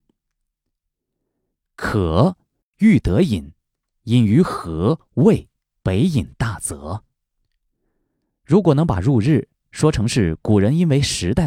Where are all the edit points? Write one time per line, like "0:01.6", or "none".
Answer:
0:05.8